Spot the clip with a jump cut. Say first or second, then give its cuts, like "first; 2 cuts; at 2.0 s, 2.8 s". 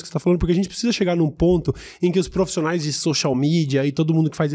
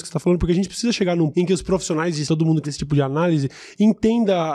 second; 3 cuts; at 1.3 s, 2.2 s, 2.6 s